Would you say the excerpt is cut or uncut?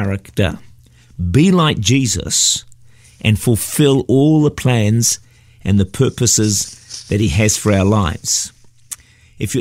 uncut